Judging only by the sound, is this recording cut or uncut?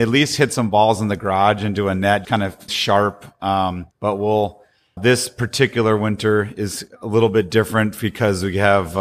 cut